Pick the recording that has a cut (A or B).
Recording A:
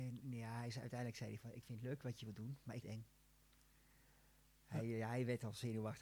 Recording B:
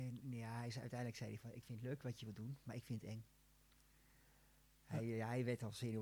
A